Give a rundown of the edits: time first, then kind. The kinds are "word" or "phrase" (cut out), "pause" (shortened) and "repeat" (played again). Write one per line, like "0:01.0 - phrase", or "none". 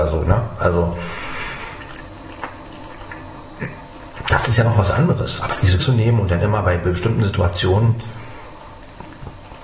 0:05.8 - word